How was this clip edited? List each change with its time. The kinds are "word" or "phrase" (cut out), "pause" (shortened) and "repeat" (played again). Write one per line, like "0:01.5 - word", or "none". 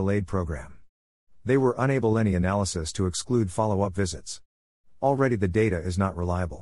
none